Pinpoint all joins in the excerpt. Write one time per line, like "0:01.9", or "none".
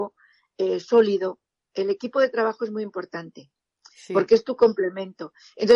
none